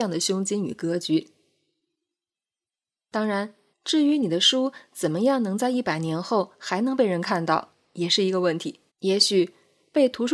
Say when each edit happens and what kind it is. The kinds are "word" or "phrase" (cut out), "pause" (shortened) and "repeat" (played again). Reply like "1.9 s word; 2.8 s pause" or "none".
3.7 s pause; 8.9 s pause